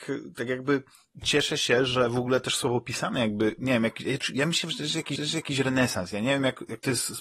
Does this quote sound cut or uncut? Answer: cut